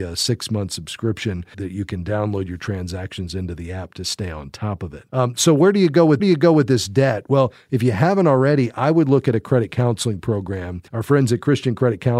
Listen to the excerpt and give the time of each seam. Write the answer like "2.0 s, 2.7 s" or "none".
1.5 s, 5.1 s, 6.2 s, 10.9 s